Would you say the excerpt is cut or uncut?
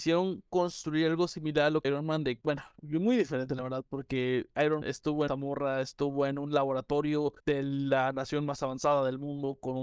cut